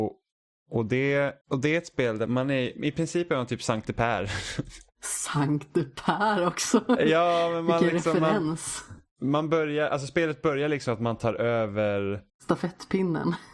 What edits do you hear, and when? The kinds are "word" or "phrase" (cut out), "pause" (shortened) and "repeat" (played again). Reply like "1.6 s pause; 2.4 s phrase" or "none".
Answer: 1.4 s pause; 2.3 s word; 12.3 s pause